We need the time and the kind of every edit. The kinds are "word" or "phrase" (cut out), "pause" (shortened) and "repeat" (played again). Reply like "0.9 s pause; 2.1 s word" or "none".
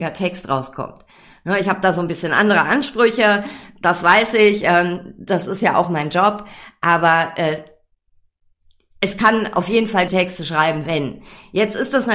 10.1 s word